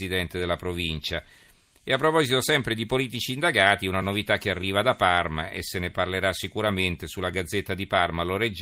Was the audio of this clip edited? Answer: no; 0 cuts

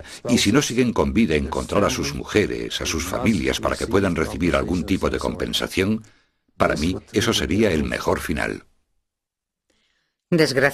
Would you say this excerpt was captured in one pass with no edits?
yes; 0 cuts

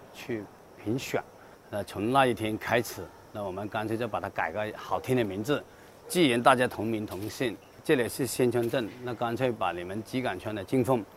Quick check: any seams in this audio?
no; 0 cuts

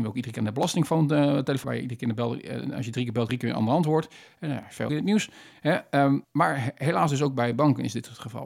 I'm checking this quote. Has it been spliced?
yes; 4 cuts; at 1.6 s, 3.3 s, 4.9 s, 6.2 s

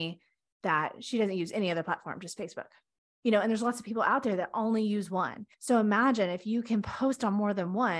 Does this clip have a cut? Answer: yes; 1 cut; at 5.5 s

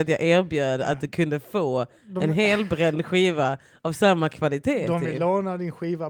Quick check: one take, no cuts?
yes; 0 cuts

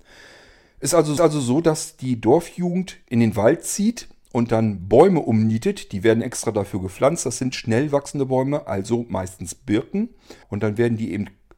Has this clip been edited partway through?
yes; 3 cuts; at 1.2 s, 7.5 s, 10.4 s

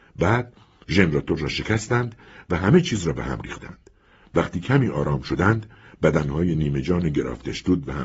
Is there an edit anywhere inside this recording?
no; 0 cuts

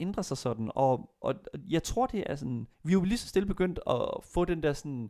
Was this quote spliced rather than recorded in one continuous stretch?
yes; 2 cuts; at 1.2 s, 2.7 s

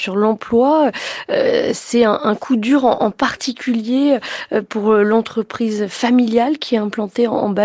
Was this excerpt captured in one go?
yes; 0 cuts

